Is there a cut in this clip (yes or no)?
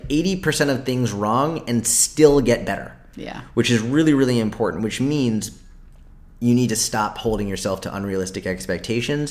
yes